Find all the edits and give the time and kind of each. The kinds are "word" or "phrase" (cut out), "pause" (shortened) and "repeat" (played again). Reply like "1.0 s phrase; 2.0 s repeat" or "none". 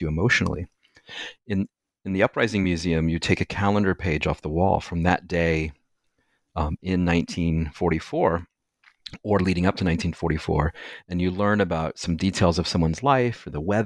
none